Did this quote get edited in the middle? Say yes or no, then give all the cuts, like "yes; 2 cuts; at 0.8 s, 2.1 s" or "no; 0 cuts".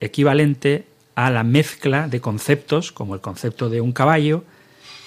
no; 0 cuts